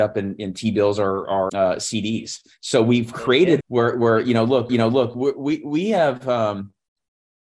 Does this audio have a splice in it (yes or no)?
yes